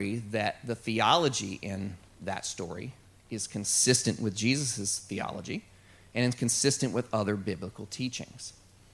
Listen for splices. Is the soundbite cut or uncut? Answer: uncut